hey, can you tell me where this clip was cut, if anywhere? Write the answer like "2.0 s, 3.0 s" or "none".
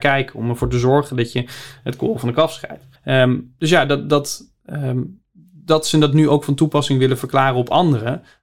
3.0 s